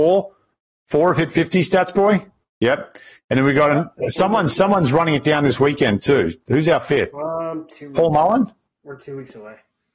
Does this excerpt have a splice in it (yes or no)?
no